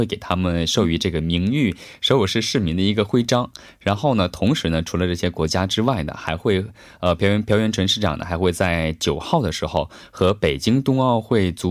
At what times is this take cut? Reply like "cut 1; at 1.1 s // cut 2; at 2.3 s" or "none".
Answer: none

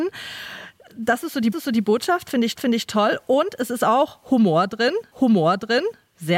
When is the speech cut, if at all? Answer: cut 1; at 1.5 s // cut 2; at 2.6 s // cut 3; at 5.1 s

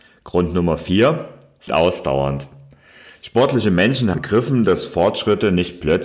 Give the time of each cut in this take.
cut 1; at 1.7 s // cut 2; at 4.1 s

